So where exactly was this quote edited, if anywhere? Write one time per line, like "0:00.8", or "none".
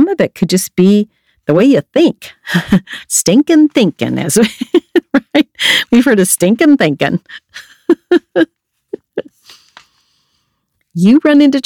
none